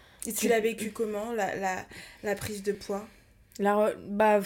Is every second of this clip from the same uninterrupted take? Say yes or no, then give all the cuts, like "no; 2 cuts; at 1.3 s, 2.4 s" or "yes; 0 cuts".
yes; 0 cuts